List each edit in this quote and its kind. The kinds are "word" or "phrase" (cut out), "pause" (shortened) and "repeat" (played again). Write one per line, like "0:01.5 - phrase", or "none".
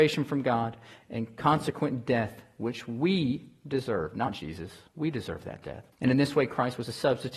0:04.9 - pause
0:05.9 - pause